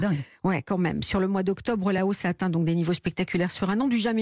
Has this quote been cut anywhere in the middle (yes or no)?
no